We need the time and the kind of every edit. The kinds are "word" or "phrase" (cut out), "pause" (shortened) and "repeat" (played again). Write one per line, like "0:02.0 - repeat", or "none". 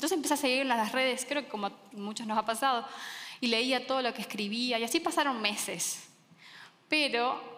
none